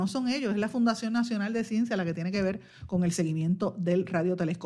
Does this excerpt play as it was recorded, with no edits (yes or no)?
yes